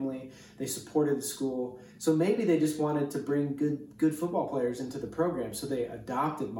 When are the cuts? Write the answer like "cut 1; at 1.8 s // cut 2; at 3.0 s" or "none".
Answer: none